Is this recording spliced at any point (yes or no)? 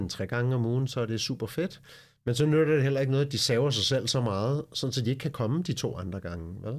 no